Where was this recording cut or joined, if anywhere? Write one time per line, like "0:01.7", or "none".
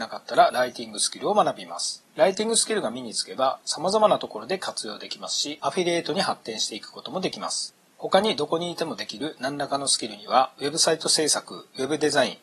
0:02.1